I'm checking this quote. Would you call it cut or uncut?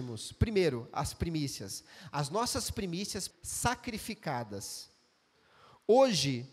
cut